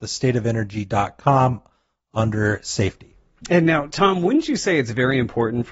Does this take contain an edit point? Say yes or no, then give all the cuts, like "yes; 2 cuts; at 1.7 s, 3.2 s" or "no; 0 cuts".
no; 0 cuts